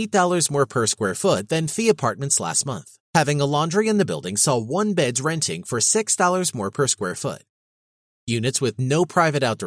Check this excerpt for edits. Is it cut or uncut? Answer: cut